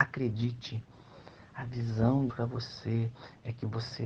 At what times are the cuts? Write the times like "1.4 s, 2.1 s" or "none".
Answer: 2.3 s